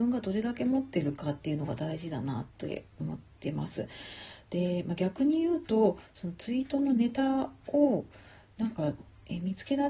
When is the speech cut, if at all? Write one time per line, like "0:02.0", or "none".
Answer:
none